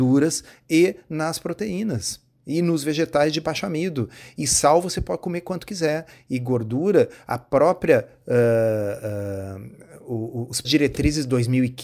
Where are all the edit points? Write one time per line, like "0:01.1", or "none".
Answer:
0:10.6